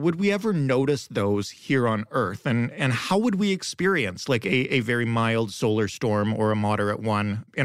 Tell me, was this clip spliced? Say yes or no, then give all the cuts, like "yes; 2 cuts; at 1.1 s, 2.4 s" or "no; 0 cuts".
no; 0 cuts